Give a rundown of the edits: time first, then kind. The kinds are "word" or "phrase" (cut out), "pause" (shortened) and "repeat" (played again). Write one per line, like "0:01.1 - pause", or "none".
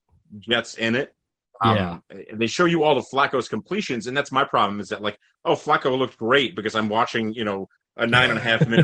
none